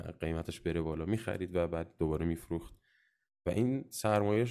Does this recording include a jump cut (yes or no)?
no